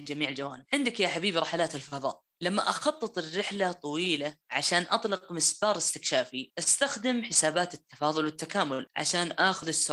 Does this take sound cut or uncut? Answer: cut